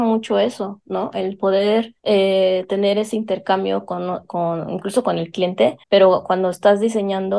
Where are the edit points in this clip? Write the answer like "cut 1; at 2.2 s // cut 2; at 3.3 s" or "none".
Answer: cut 1; at 2.0 s // cut 2; at 5.8 s